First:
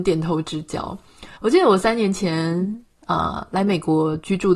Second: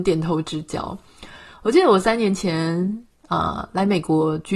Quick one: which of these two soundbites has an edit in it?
first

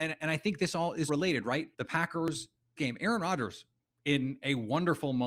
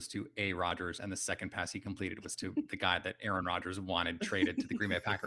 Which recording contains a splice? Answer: first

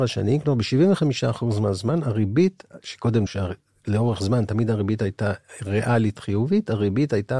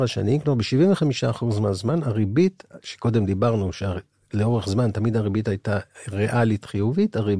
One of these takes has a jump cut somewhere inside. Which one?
first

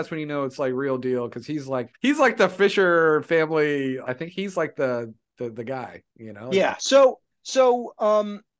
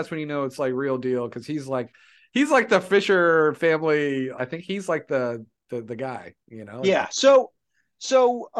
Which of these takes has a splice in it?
first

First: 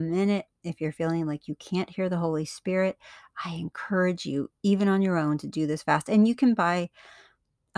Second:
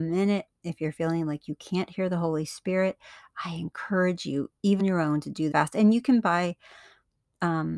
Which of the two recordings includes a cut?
second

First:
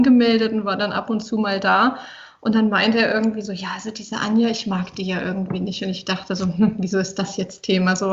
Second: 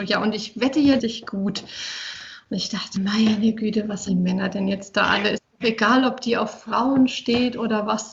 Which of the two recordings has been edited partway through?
second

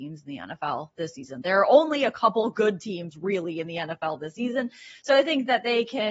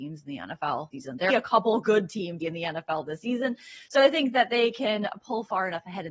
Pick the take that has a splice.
second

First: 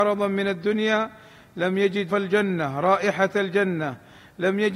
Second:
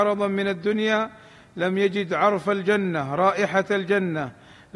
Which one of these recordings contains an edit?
first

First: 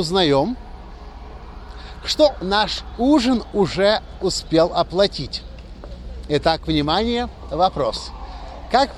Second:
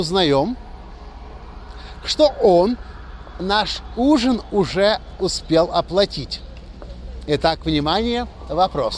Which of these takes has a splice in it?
first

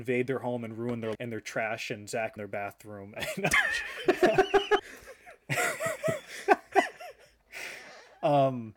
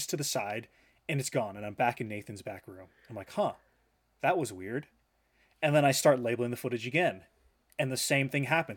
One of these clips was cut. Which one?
first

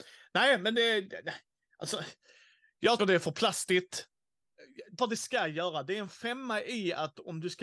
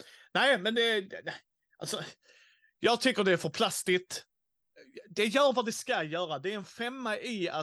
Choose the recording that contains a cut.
first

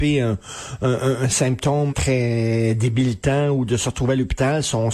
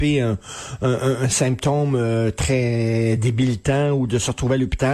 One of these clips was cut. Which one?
first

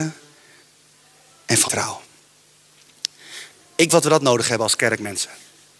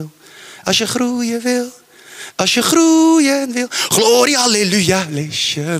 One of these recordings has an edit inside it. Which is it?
first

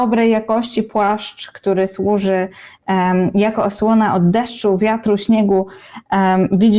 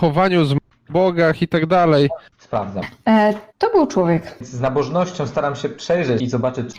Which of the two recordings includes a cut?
second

